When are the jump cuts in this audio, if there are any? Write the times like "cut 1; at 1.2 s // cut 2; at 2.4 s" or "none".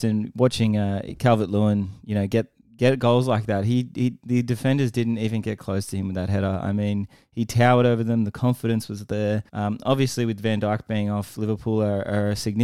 cut 1; at 9.5 s